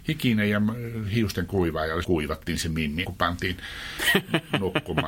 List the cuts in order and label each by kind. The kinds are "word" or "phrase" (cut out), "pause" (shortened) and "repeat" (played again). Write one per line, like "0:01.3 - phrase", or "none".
0:02.0 - word
0:03.0 - word